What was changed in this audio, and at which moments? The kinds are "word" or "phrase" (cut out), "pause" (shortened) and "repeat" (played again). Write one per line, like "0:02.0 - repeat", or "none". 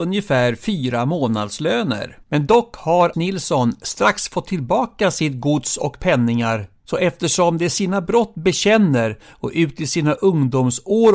0:02.2 - pause
0:03.1 - word